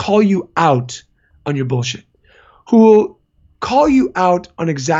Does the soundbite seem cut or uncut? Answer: uncut